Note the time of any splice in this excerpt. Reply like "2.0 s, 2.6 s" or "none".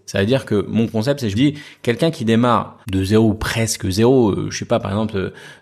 1.3 s, 2.8 s